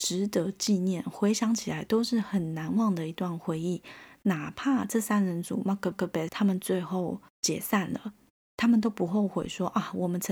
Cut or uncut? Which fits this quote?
cut